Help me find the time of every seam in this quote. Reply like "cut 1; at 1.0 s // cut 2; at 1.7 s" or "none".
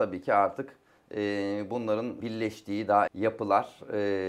cut 1; at 2.2 s // cut 2; at 3.1 s

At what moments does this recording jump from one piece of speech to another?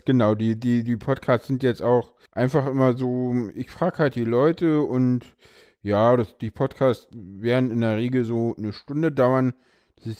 cut 1; at 2.3 s

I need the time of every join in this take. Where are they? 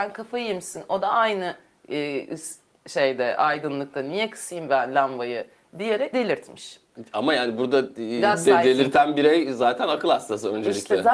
cut 1; at 6.1 s

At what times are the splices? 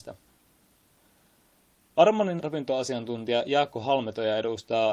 cut 1; at 2.4 s

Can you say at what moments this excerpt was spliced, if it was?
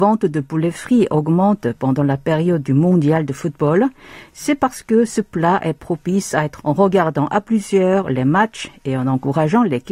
cut 1; at 6.6 s

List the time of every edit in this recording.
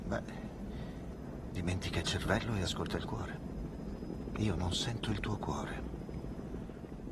none

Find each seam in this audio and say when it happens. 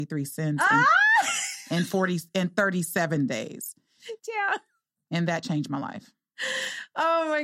cut 1; at 4.2 s

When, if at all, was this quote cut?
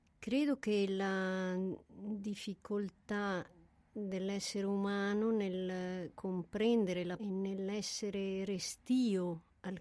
cut 1; at 6.1 s // cut 2; at 7.2 s

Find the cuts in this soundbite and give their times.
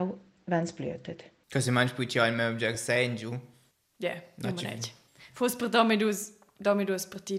none

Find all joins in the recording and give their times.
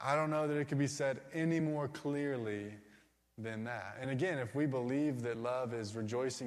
none

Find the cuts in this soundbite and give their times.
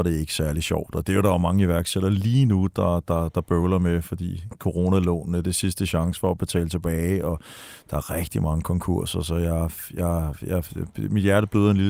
none

